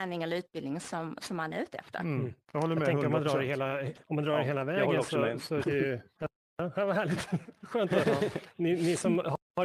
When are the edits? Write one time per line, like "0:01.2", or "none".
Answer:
0:04.0
0:05.6